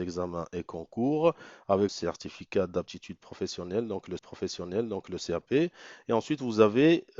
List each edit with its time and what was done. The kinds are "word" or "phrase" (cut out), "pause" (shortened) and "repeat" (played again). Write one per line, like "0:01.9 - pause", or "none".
0:01.9 - phrase
0:04.2 - repeat